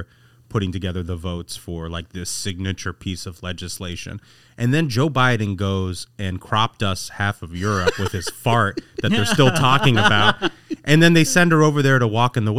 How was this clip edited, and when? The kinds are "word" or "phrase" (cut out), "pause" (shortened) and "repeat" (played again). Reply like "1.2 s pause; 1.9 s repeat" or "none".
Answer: none

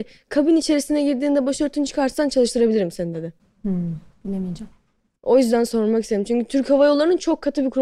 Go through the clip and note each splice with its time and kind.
none

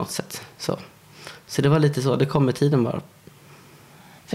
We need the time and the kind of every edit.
none

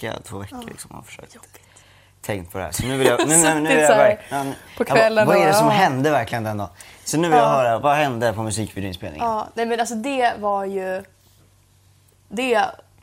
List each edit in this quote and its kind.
none

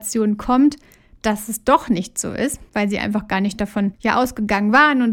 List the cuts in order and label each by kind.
2.7 s pause; 3.9 s pause

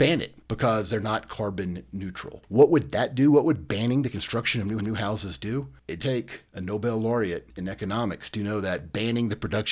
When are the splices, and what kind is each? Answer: 4.8 s repeat; 6.0 s word

